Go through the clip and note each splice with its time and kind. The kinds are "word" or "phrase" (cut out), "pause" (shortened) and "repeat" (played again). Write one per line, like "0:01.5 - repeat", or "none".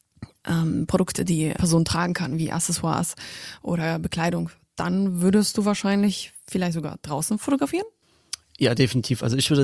0:01.6 - word